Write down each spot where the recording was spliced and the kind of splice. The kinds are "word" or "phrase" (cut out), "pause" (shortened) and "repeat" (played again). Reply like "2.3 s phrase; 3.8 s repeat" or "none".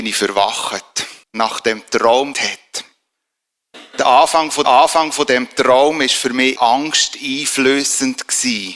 1.2 s pause; 2.3 s phrase; 4.6 s repeat; 6.6 s word